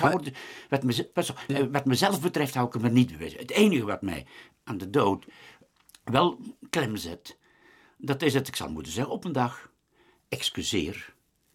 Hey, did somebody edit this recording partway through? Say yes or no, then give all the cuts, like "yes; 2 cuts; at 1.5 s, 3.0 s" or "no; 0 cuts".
no; 0 cuts